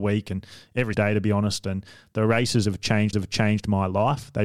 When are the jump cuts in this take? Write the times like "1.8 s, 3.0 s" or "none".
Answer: 0.9 s, 3.1 s